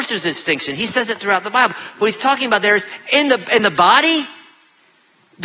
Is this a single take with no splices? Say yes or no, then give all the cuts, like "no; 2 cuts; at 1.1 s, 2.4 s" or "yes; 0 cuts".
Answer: yes; 0 cuts